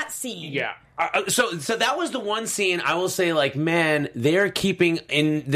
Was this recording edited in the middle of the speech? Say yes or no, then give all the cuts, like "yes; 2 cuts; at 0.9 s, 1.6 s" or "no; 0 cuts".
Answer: no; 0 cuts